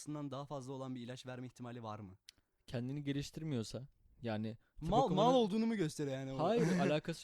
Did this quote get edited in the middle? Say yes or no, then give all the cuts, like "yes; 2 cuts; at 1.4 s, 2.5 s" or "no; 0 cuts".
no; 0 cuts